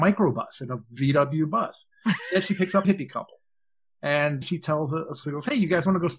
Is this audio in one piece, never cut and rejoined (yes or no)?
no